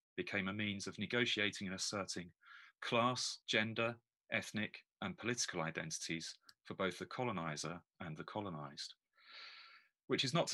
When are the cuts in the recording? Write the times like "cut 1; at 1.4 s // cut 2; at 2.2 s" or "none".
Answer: cut 1; at 3.4 s